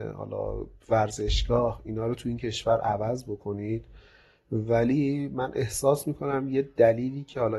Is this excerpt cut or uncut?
uncut